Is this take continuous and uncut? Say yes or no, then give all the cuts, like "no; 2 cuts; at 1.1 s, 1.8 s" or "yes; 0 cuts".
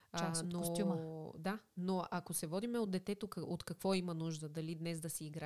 yes; 0 cuts